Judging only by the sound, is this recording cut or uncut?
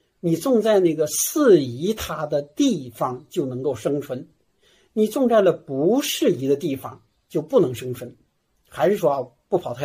uncut